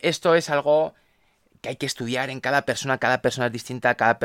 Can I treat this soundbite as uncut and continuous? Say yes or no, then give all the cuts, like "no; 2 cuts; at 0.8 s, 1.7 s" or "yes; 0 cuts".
yes; 0 cuts